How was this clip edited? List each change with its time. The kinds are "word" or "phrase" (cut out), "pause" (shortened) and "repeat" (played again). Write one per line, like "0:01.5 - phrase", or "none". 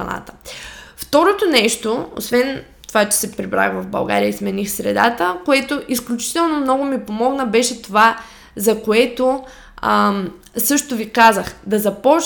none

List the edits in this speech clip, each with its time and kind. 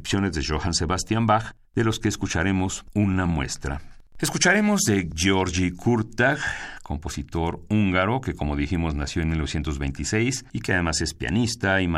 0:04.1 - pause

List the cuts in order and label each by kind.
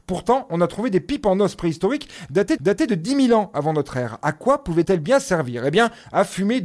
0:02.6 - repeat
0:04.8 - word

